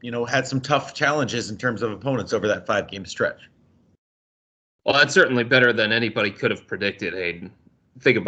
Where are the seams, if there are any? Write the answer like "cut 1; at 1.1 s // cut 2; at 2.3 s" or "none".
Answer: none